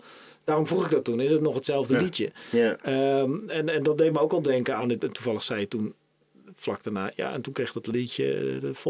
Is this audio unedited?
yes; 0 cuts

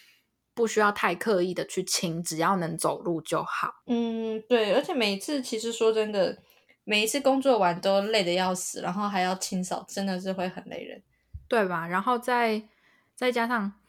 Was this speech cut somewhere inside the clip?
no; 0 cuts

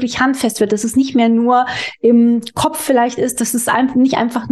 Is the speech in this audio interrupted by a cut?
no; 0 cuts

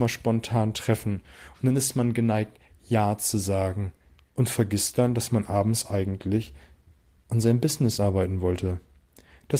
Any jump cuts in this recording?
no; 0 cuts

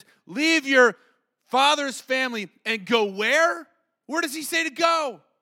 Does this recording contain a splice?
no; 0 cuts

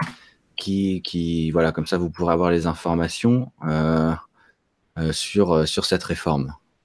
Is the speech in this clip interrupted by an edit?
no; 0 cuts

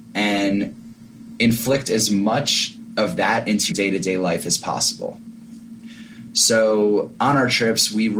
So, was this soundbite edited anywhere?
yes; 1 cut; at 3.7 s

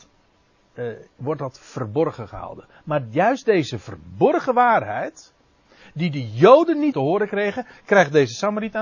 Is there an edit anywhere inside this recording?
yes; 1 cut; at 6.9 s

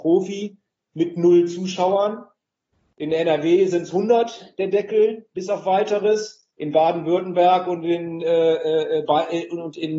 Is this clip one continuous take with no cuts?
no; 1 cut; at 6.5 s

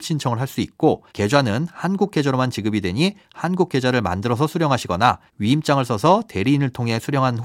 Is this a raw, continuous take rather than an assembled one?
no; 2 cuts; at 1.1 s, 5.3 s

